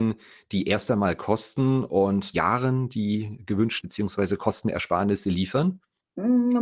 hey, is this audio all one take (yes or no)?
no